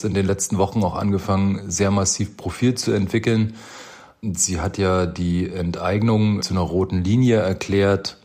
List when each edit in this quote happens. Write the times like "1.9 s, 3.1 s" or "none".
none